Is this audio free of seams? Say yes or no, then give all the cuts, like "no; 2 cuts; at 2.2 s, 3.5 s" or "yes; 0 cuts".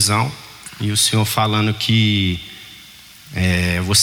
yes; 0 cuts